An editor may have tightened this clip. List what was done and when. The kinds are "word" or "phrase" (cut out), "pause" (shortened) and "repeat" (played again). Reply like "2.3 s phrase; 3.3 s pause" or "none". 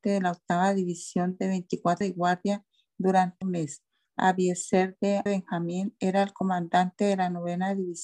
2.0 s phrase; 3.4 s phrase; 4.0 s pause; 5.3 s phrase